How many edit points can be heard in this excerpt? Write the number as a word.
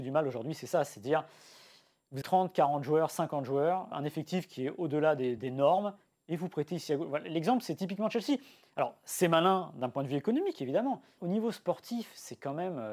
four